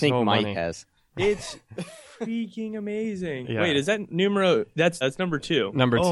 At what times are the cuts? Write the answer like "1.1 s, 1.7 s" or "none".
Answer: 5.0 s